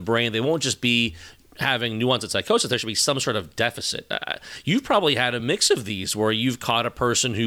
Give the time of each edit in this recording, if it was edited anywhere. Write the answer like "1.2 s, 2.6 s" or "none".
none